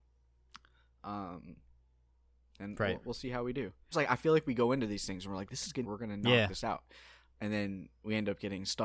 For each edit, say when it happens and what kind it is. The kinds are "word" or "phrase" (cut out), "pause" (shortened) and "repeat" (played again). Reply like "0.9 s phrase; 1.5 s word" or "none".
3.9 s word; 5.8 s phrase